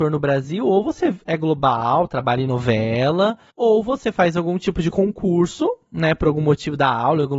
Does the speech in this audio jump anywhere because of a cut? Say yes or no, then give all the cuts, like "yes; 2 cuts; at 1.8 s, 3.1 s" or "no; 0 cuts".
no; 0 cuts